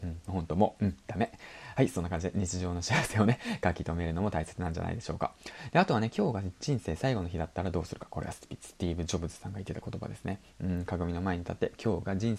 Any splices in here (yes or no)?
no